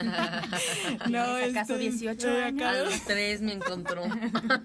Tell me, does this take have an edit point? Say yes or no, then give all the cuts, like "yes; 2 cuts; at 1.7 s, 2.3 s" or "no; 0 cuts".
no; 0 cuts